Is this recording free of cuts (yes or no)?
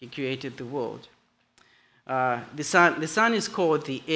yes